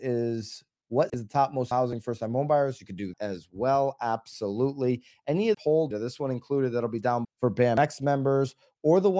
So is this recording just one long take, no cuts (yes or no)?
no